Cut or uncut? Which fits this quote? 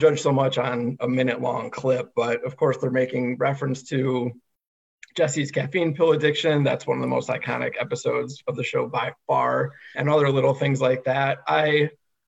cut